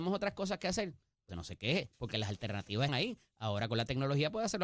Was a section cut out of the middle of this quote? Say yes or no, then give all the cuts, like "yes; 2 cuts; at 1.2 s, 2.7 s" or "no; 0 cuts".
yes; 2 cuts; at 1.3 s, 2.9 s